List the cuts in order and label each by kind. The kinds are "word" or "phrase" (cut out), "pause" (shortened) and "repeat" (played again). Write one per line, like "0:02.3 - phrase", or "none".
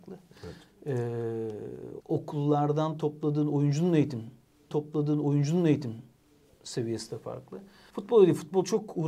0:02.0 - word
0:04.7 - repeat
0:07.9 - pause